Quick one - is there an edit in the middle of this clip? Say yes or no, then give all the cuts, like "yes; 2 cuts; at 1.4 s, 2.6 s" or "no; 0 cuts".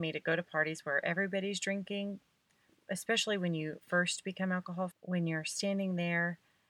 yes; 2 cuts; at 3.8 s, 4.9 s